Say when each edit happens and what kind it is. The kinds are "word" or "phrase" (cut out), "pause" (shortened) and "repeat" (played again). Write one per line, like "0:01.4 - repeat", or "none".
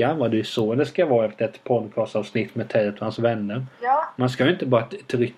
0:03.7 - pause